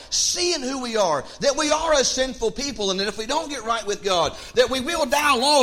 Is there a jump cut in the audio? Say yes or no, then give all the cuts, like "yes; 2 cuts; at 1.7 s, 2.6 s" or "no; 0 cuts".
no; 0 cuts